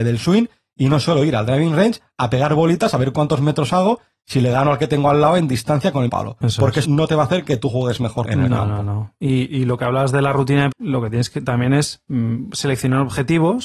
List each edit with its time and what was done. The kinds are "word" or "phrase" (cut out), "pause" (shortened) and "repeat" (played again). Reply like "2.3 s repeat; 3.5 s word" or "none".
6.1 s word; 6.8 s word; 8.2 s word; 10.7 s word